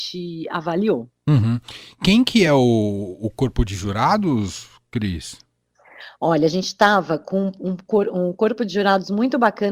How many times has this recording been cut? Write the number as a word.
zero